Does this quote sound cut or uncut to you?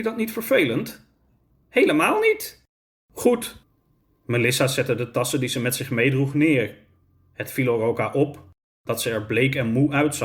uncut